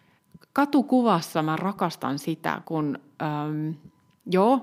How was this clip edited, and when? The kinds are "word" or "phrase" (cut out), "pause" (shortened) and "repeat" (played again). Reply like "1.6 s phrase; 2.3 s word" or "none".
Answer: 2.6 s word